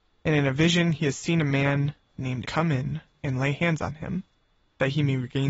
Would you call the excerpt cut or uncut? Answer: cut